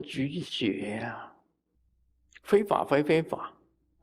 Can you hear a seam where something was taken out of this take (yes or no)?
yes